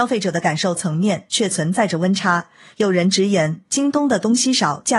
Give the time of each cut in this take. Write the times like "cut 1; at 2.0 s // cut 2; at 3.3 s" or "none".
none